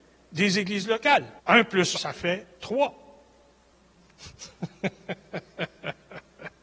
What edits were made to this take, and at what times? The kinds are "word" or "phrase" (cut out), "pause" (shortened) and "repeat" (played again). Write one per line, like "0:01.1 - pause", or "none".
0:01.4 - pause
0:01.9 - word
0:02.5 - pause